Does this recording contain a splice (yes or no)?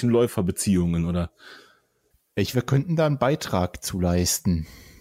yes